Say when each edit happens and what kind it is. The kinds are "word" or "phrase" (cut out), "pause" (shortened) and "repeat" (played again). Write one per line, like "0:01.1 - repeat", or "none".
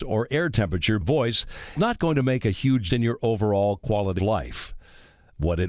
0:01.0 - word
0:01.8 - word
0:02.9 - word
0:04.2 - word